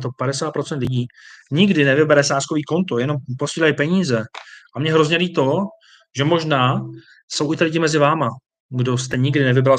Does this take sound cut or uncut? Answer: uncut